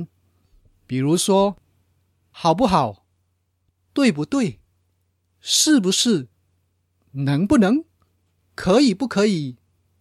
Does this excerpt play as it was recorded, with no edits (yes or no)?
yes